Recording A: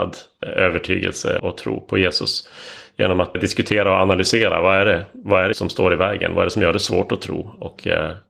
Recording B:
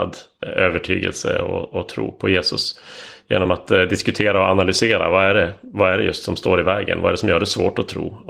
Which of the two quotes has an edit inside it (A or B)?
A